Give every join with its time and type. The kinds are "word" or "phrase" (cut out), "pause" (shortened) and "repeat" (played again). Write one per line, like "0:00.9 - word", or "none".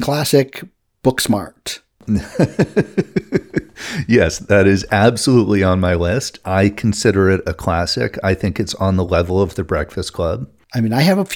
none